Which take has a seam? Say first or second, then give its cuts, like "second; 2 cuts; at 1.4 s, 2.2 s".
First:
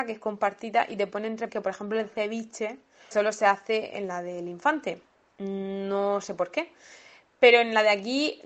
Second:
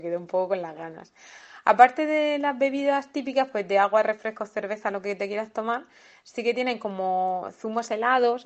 first; 2 cuts; at 1.5 s, 3.1 s